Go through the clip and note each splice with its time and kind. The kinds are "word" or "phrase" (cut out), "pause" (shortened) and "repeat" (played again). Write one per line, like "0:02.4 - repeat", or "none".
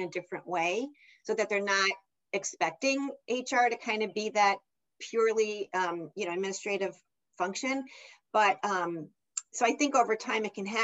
none